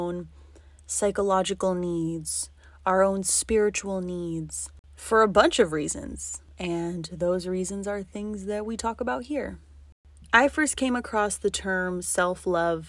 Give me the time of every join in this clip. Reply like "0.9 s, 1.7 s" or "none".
none